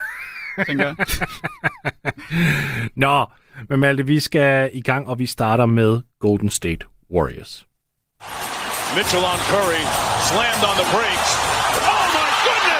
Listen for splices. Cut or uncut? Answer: uncut